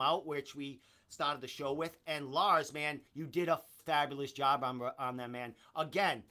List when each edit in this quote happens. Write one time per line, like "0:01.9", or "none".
0:03.1
0:03.8